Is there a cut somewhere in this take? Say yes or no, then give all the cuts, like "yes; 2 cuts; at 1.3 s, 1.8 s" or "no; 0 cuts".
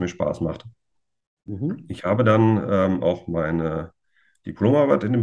no; 0 cuts